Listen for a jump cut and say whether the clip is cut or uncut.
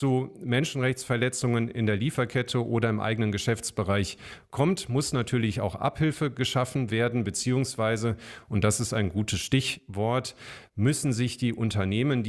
uncut